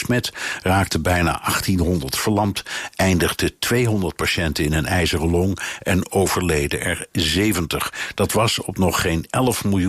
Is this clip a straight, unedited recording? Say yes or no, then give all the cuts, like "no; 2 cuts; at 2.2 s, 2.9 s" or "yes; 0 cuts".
yes; 0 cuts